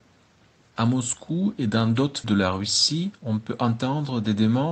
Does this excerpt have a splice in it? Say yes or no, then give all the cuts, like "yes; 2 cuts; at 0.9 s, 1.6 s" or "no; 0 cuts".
yes; 1 cut; at 2.2 s